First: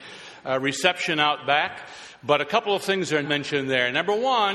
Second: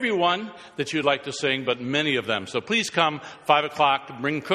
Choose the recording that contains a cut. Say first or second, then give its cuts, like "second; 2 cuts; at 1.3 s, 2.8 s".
first; 1 cut; at 3.2 s